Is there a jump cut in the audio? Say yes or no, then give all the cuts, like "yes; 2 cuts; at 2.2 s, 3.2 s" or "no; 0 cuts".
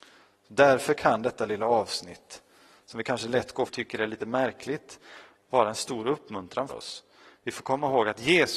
yes; 2 cuts; at 3.7 s, 6.7 s